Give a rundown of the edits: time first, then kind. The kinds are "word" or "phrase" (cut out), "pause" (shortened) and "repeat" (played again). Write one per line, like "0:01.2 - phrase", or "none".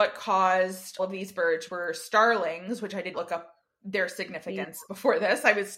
0:01.0 - word
0:01.7 - word
0:03.1 - word
0:03.6 - pause